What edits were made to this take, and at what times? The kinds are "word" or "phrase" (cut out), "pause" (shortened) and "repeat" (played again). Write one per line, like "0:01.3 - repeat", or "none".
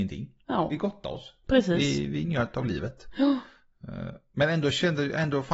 none